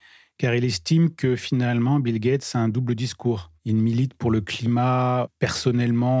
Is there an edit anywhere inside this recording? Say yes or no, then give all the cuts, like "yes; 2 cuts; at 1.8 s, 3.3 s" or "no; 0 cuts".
yes; 1 cut; at 3.6 s